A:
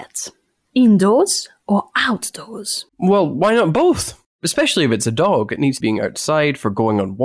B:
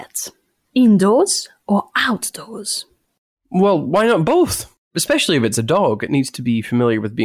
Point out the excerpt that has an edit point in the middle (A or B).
A